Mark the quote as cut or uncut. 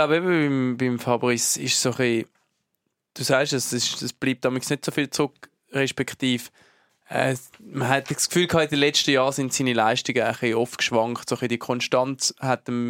uncut